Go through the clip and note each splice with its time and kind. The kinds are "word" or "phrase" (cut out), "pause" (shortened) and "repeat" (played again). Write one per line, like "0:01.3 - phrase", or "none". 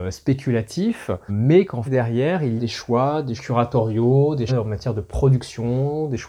0:01.3 - word
0:01.9 - word
0:02.6 - word
0:03.4 - word
0:04.5 - word